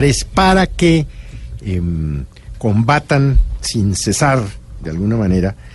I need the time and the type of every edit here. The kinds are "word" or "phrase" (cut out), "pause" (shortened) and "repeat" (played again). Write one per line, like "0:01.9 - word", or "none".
none